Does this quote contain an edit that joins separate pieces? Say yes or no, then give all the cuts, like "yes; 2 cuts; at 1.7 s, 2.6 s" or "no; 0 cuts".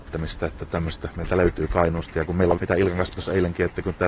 yes; 2 cuts; at 2.6 s, 3.2 s